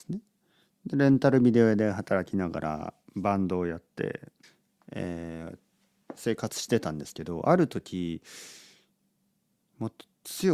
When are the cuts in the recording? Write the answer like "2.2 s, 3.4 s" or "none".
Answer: 4.4 s